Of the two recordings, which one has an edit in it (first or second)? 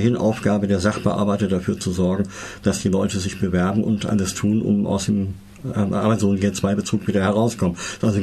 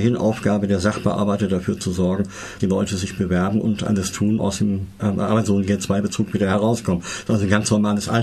second